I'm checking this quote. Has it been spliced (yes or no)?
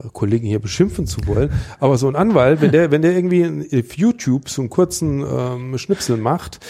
no